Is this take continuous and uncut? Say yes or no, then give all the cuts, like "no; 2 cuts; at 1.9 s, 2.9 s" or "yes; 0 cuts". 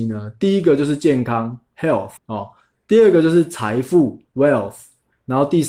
no; 1 cut; at 2.2 s